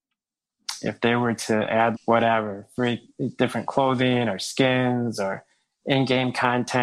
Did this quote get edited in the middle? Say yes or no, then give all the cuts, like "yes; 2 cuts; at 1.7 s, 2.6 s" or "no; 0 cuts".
yes; 1 cut; at 1.9 s